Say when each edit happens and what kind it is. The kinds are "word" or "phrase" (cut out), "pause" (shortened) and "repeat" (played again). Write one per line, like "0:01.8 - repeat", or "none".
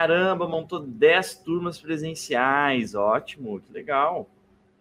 none